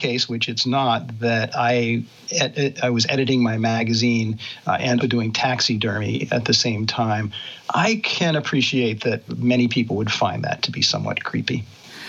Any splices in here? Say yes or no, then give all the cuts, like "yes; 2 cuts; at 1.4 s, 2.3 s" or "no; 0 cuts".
yes; 3 cuts; at 5.0 s, 7.6 s, 9.3 s